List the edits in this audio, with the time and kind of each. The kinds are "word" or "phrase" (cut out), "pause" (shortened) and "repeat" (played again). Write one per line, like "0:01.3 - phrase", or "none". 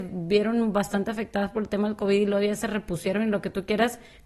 none